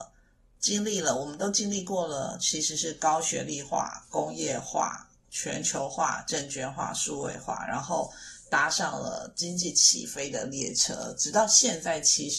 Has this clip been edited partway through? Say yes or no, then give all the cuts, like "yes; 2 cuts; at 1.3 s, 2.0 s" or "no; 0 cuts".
yes; 1 cut; at 5.2 s